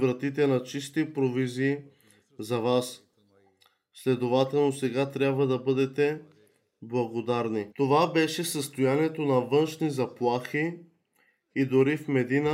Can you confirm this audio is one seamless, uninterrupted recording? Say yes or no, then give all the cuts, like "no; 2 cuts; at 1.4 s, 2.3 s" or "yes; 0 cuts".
no; 1 cut; at 7.7 s